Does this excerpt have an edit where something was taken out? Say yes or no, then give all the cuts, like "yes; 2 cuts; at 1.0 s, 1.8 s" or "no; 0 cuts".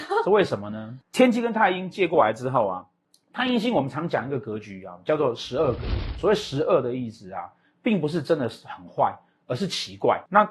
no; 0 cuts